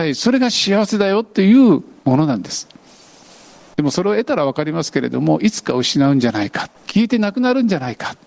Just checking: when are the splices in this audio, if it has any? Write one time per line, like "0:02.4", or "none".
0:06.8

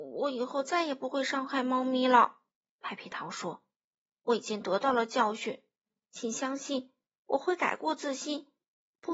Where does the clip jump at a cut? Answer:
none

